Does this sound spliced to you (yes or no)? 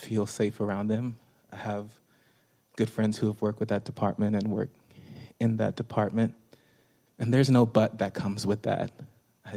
no